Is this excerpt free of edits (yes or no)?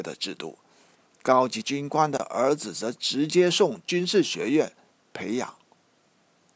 yes